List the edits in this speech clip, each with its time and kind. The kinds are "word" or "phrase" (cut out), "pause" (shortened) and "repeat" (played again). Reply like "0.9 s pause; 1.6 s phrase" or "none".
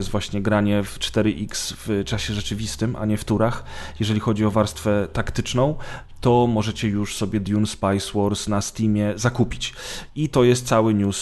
none